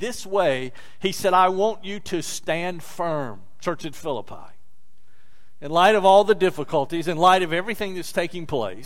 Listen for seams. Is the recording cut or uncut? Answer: uncut